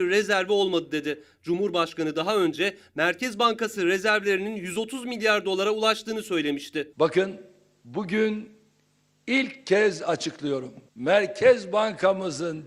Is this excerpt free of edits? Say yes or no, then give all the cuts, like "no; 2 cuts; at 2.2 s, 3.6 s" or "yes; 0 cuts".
yes; 0 cuts